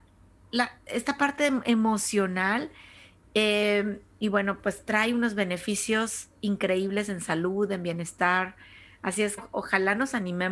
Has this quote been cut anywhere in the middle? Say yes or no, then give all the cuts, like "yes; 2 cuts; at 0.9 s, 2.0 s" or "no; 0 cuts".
yes; 1 cut; at 9.4 s